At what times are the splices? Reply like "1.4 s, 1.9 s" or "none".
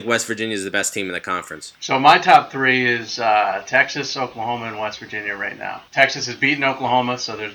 5.9 s